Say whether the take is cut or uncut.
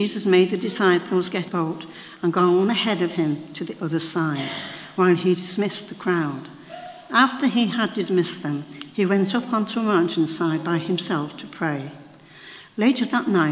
cut